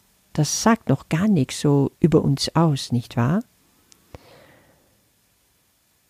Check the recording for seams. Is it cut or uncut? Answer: cut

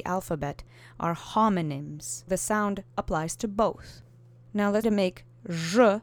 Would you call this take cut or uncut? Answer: cut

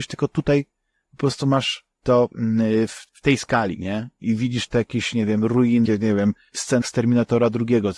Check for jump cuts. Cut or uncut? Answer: cut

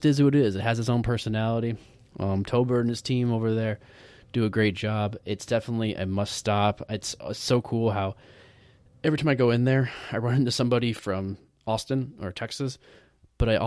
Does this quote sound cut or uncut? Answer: uncut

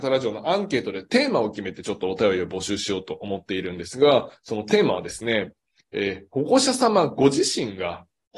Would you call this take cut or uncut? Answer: uncut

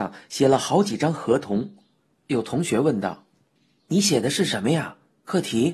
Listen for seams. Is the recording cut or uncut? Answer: uncut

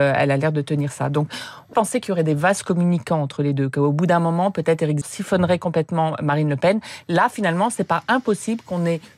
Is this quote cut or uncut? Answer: cut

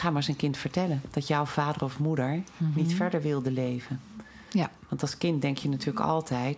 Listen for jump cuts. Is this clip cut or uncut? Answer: uncut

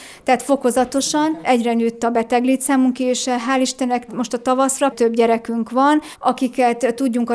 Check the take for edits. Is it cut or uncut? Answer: cut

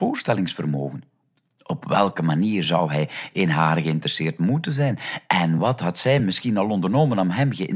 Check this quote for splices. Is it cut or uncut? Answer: uncut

